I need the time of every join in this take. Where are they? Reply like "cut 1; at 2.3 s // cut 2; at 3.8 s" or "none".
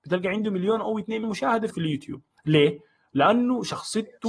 cut 1; at 1.2 s // cut 2; at 1.7 s